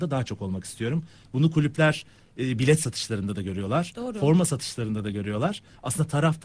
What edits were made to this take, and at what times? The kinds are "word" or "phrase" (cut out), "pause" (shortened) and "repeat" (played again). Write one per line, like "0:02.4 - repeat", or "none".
none